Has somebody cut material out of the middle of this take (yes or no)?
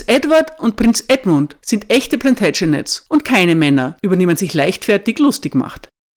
no